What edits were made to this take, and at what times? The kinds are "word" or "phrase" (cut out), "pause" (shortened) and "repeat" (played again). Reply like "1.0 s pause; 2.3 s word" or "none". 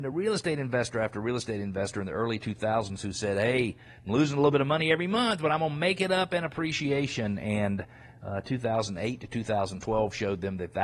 none